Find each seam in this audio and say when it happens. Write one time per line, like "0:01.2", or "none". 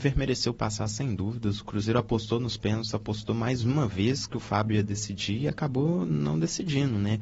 none